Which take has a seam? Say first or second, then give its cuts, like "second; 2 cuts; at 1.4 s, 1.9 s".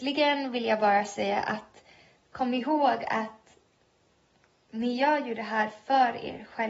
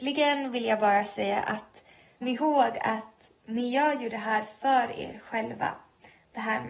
second; 2 cuts; at 2.2 s, 3.4 s